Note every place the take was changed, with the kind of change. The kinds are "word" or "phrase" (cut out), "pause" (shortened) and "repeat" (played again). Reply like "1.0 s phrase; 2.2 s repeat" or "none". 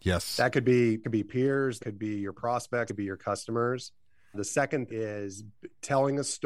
1.0 s word; 1.8 s word; 2.9 s word; 4.3 s word; 4.9 s word